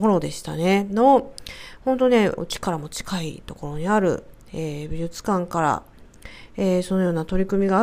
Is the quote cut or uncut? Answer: cut